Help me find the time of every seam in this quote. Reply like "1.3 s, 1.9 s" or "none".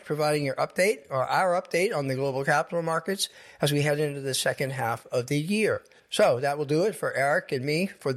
6.0 s